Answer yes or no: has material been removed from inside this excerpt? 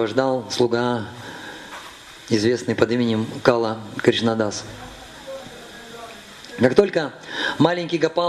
no